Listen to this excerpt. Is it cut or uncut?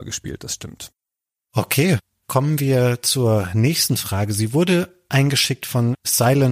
uncut